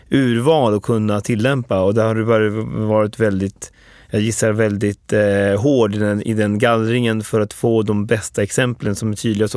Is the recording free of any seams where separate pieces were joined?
yes; 0 cuts

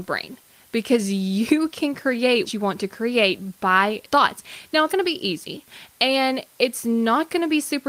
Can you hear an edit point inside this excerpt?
yes; 3 cuts; at 2.5 s, 4.0 s, 4.9 s

